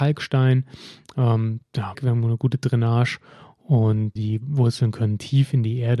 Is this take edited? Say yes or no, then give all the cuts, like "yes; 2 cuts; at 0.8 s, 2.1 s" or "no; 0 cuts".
yes; 2 cuts; at 1.9 s, 4.2 s